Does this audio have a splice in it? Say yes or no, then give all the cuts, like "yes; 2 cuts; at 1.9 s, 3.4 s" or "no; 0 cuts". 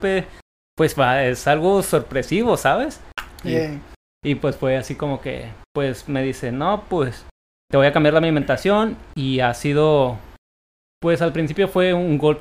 no; 0 cuts